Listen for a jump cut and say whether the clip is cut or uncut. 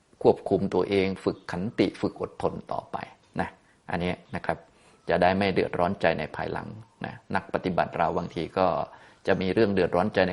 uncut